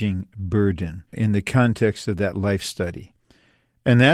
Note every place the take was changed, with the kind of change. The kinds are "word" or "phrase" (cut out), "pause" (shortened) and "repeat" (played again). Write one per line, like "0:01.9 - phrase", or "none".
0:01.1 - pause

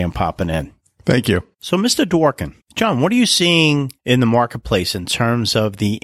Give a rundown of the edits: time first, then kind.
0:01.5 - pause
0:02.6 - pause
0:04.0 - pause

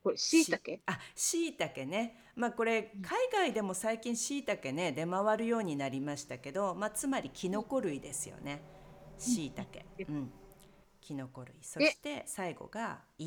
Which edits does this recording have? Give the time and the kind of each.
none

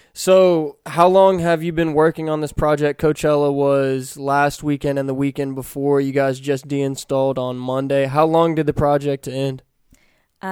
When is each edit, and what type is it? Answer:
0:09.2 - phrase

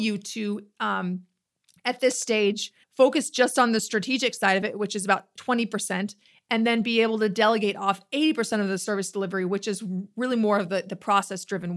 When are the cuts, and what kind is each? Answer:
0:02.8 - pause

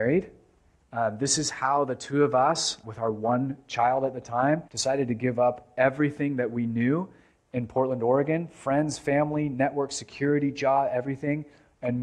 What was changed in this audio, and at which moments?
0:02.8 - word
0:04.7 - pause

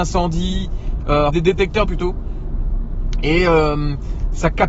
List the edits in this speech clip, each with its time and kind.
0:01.3 - word
0:01.8 - word

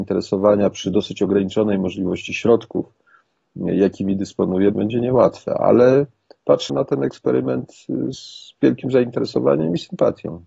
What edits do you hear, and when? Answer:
0:04.7 - word
0:06.7 - word
0:08.1 - word

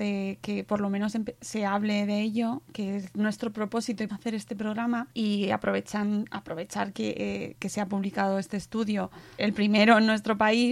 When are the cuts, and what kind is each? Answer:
0:04.1 - phrase
0:05.1 - pause
0:09.4 - word

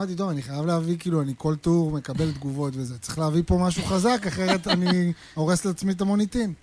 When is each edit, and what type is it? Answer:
0:05.3 - pause

